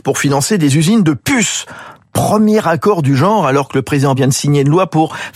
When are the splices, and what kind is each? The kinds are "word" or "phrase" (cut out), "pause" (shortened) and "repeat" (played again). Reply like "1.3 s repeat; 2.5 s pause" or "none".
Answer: 4.2 s word